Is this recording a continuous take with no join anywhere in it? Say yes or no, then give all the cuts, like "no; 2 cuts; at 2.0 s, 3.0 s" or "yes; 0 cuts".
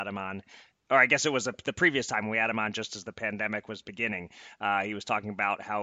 yes; 0 cuts